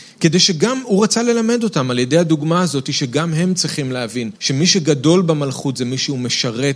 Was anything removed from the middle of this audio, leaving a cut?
yes; 1 cut; at 4.4 s

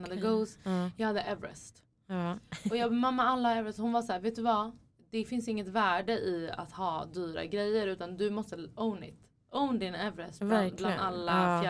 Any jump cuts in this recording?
no; 0 cuts

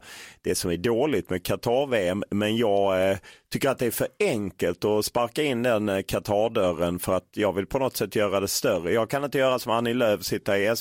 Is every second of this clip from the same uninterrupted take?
yes; 0 cuts

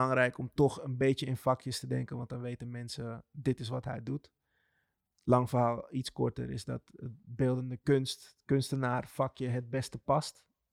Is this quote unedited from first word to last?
yes; 0 cuts

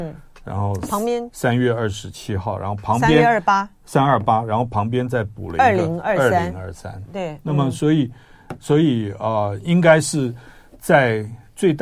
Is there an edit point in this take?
no; 0 cuts

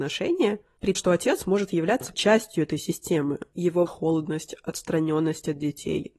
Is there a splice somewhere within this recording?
yes; 3 cuts; at 0.9 s, 2.1 s, 3.9 s

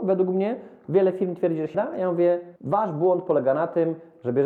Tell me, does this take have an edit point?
yes; 2 cuts; at 1.7 s, 2.6 s

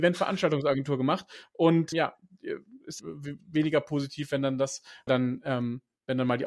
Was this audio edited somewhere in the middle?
yes; 3 cuts; at 1.9 s, 3.0 s, 5.1 s

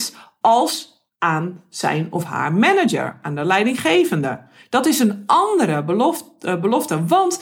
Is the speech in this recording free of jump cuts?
yes; 0 cuts

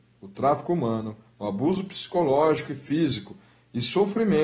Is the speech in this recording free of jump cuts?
yes; 0 cuts

